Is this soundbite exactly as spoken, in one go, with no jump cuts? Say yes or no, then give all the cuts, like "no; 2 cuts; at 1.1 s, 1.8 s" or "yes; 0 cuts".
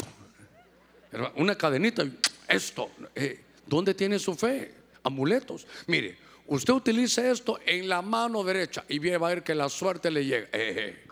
yes; 0 cuts